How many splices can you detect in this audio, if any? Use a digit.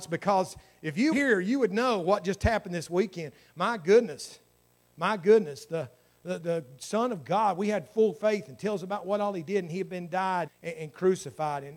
3